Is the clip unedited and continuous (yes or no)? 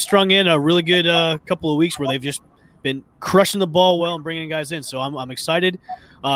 no